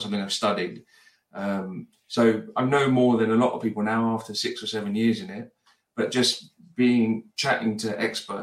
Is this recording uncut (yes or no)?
yes